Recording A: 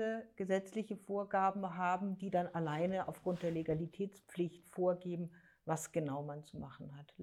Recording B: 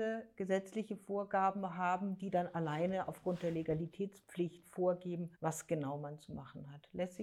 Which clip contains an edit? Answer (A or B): B